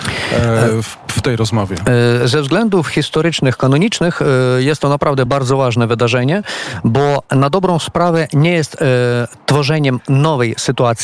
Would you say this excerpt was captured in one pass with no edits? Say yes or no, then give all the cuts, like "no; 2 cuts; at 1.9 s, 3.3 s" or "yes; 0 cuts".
yes; 0 cuts